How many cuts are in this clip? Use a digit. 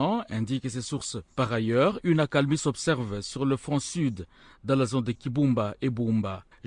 0